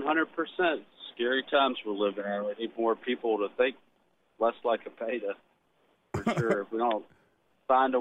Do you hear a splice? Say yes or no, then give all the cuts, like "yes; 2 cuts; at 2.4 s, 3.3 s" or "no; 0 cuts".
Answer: no; 0 cuts